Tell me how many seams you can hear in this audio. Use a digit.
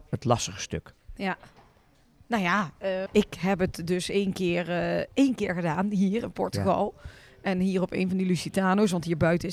1